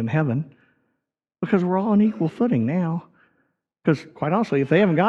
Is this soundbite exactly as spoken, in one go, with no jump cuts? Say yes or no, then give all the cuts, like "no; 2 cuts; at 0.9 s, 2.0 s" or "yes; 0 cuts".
yes; 0 cuts